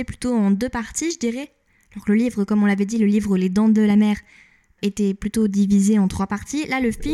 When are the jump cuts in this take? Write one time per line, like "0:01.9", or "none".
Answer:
none